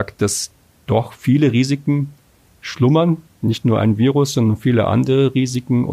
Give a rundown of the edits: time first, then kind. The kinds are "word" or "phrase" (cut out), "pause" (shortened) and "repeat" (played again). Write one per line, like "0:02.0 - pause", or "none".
none